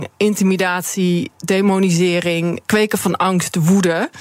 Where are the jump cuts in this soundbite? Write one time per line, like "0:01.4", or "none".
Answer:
0:02.7